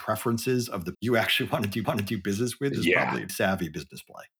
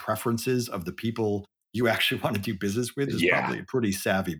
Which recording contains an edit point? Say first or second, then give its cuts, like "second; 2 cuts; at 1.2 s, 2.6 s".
first; 3 cuts; at 0.9 s, 1.8 s, 3.3 s